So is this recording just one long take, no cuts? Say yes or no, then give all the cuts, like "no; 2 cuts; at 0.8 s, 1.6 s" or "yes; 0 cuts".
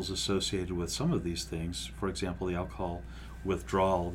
yes; 0 cuts